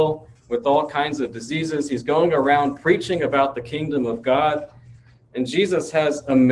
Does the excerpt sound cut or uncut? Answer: uncut